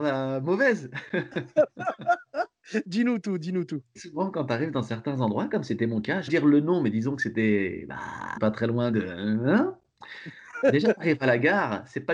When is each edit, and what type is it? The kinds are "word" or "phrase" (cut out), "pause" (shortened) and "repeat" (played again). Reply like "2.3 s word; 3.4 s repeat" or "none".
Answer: 6.3 s phrase; 8.4 s word